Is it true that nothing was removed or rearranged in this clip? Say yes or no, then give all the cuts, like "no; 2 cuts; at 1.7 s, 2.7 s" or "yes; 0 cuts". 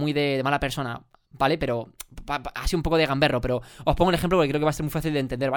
yes; 0 cuts